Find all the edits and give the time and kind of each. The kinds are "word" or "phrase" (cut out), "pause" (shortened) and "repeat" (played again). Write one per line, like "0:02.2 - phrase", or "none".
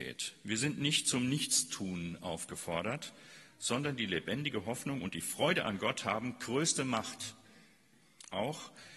none